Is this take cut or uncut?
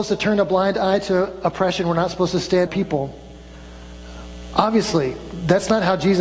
cut